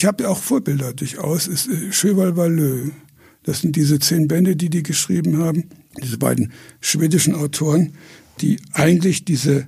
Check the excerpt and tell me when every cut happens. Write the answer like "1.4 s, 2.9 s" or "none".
none

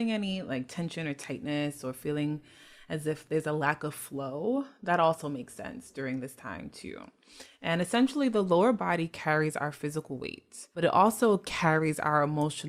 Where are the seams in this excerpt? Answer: 10.7 s

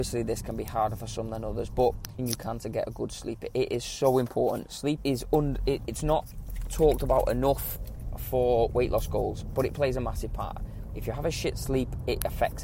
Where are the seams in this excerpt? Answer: 2.2 s, 5.0 s, 5.9 s

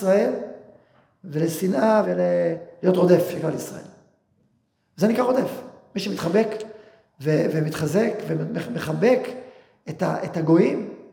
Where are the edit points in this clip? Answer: 2.0 s

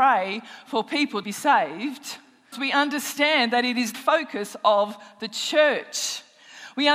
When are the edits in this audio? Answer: 1.2 s, 2.5 s, 3.9 s

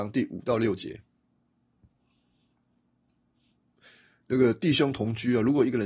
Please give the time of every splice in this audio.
none

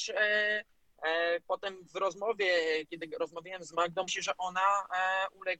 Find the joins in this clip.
4.1 s

